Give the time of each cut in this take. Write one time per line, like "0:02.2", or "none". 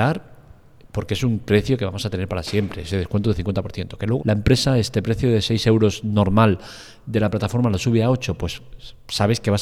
0:04.2